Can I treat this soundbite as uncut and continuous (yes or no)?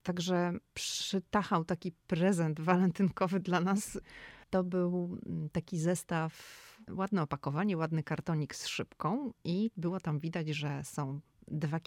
no